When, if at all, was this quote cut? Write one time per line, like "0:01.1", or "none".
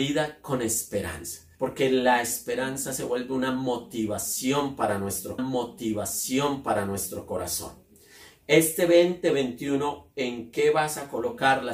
0:01.5
0:05.4